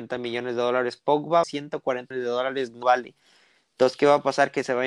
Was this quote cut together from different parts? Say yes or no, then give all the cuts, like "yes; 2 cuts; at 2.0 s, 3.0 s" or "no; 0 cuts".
yes; 3 cuts; at 1.4 s, 2.1 s, 2.8 s